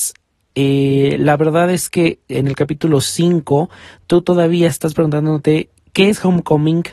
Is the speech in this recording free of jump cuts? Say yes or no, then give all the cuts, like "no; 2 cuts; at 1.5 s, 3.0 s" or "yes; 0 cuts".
yes; 0 cuts